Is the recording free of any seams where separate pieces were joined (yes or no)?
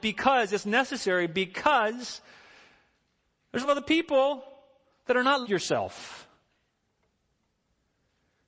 no